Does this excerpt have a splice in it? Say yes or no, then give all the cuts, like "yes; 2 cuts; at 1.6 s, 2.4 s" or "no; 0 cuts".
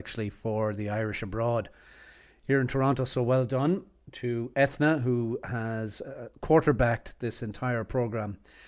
no; 0 cuts